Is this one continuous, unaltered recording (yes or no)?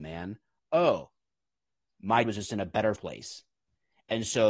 no